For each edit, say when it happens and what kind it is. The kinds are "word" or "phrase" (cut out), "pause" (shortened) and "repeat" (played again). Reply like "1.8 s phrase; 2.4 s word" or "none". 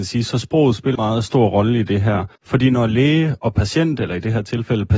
0.9 s phrase; 2.4 s pause